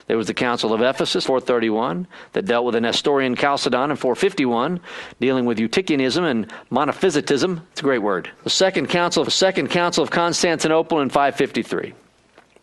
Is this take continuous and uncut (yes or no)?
no